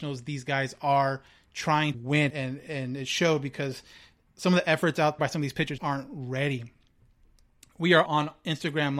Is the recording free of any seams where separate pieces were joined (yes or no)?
no